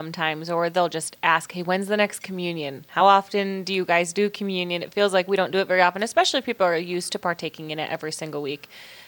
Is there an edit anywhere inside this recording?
no; 0 cuts

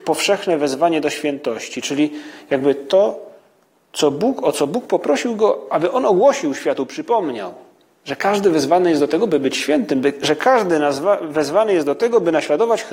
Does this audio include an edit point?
no; 0 cuts

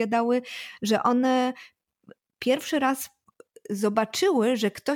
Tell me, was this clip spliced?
no; 0 cuts

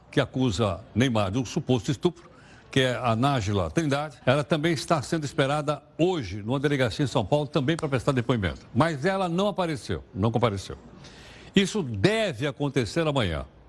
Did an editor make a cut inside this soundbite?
yes; 1 cut; at 4.2 s

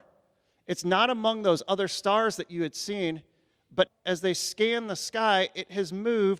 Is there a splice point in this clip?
yes; 1 cut; at 3.9 s

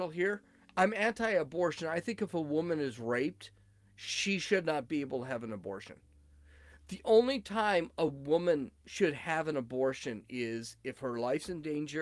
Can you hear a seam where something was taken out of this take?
no; 0 cuts

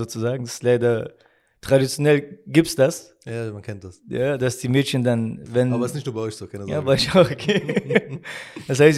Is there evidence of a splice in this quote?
no; 0 cuts

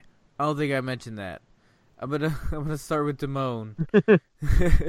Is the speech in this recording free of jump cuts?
yes; 0 cuts

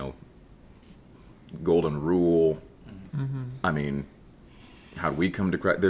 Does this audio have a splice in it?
no; 0 cuts

